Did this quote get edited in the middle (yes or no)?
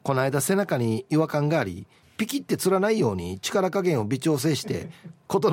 no